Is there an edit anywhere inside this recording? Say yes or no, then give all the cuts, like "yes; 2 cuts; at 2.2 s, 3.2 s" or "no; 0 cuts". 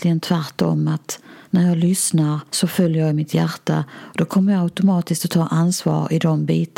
yes; 2 cuts; at 1.4 s, 2.5 s